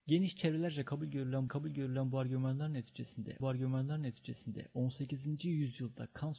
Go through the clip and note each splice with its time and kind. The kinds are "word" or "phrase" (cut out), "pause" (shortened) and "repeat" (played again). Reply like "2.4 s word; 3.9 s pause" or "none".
1.5 s repeat; 3.4 s repeat

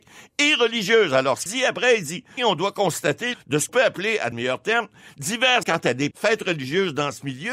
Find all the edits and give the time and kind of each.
1.5 s word; 2.4 s word; 3.3 s word; 3.7 s word; 4.3 s word; 5.6 s word; 6.1 s word

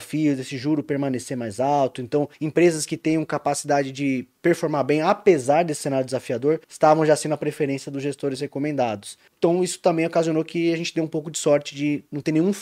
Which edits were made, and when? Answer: 2.3 s pause; 6.6 s pause; 9.3 s pause

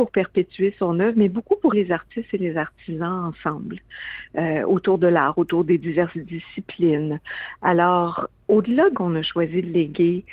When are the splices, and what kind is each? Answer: 1.7 s word; 8.9 s word

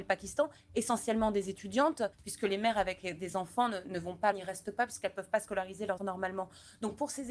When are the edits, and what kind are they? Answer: 2.1 s pause; 4.3 s word; 6.0 s word

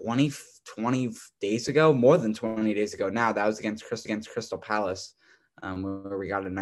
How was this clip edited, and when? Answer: 4.0 s repeat

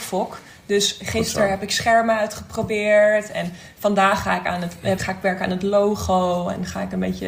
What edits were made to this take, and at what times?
5.0 s word

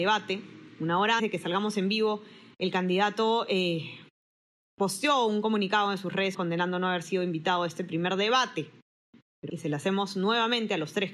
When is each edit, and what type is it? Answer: 1.2 s word; 6.3 s word; 9.5 s phrase

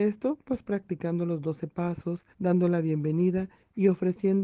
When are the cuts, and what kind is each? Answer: 2.3 s pause

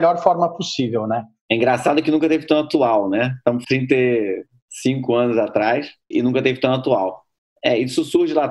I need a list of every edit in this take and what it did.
3.6 s phrase; 6.1 s word

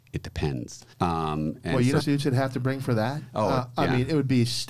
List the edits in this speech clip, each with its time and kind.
0.9 s pause; 2.0 s phrase

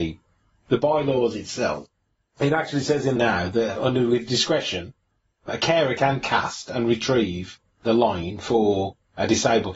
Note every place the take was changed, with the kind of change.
3.2 s word

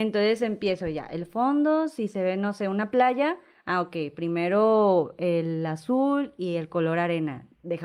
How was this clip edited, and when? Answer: none

